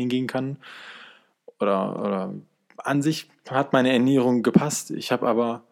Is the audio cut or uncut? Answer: uncut